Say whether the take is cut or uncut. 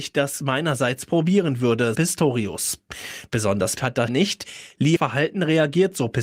cut